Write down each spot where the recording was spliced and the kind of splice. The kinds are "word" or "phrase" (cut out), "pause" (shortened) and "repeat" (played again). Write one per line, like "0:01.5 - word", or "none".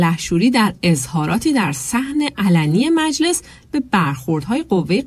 none